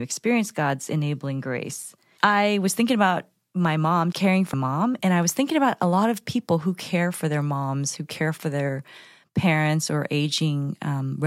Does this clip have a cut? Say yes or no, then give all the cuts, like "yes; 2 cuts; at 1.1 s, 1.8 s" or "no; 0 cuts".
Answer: yes; 4 cuts; at 2.2 s, 4.1 s, 4.5 s, 5.0 s